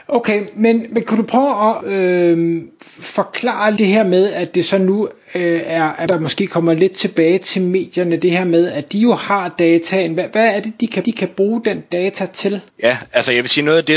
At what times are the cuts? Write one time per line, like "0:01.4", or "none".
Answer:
0:01.8
0:03.8
0:06.1
0:11.0
0:12.7